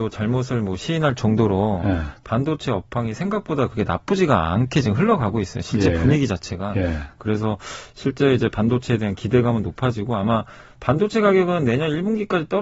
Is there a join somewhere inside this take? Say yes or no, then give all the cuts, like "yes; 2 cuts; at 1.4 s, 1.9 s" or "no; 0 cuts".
no; 0 cuts